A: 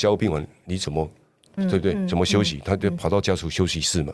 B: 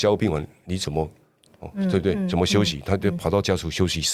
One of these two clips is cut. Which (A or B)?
A